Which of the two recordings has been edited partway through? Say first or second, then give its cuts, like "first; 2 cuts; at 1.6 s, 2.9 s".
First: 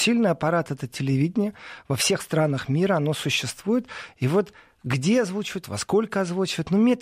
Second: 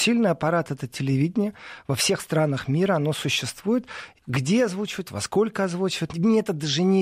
second; 2 cuts; at 4.2 s, 6.1 s